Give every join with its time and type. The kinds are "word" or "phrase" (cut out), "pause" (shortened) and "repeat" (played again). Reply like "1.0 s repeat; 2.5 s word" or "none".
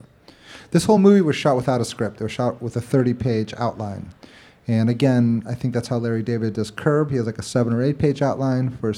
none